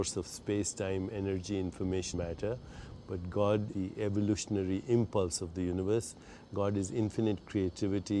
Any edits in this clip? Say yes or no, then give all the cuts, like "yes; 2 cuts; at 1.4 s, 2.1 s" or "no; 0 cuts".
yes; 2 cuts; at 2.1 s, 3.7 s